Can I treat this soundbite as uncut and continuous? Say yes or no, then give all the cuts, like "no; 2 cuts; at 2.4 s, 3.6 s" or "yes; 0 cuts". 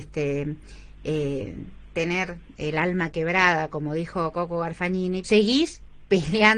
no; 1 cut; at 5.2 s